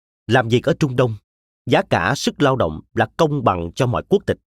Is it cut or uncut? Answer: uncut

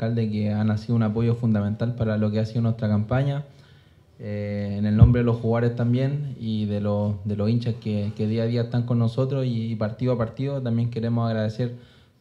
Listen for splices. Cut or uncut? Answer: uncut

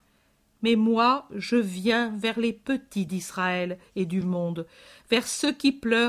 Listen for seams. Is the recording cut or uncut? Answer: uncut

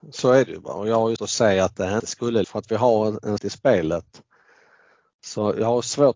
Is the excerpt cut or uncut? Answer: cut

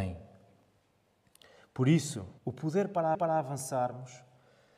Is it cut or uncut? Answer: cut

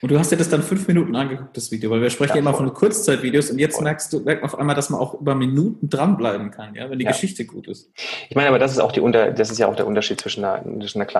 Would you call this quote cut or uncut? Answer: uncut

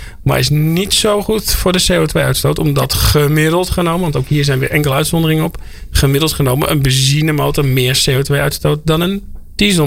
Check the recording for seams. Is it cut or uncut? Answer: uncut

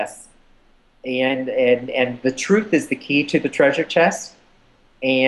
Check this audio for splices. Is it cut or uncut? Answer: uncut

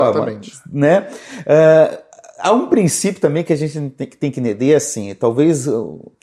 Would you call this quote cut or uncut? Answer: uncut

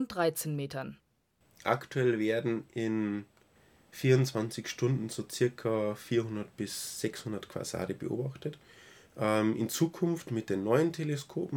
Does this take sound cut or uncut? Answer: uncut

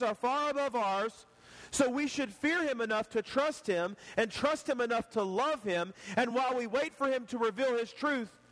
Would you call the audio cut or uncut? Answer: uncut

